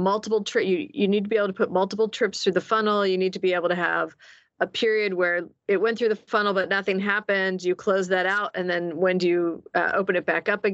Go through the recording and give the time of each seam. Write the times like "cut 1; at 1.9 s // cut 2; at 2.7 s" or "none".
none

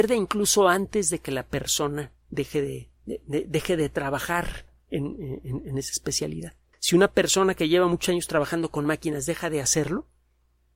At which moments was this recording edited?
cut 1; at 2.2 s // cut 2; at 2.9 s // cut 3; at 6.7 s

